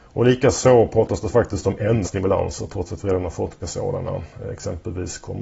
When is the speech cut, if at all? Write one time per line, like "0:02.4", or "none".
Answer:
0:02.0
0:03.6